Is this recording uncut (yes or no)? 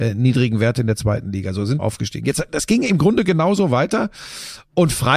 no